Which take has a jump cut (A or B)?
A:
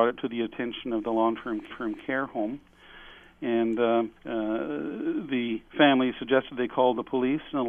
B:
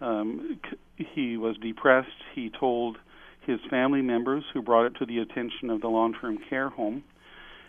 A